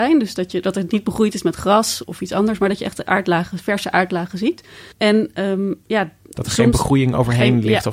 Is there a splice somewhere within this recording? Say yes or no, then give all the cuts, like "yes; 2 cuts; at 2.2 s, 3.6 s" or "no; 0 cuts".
yes; 2 cuts; at 2.0 s, 4.9 s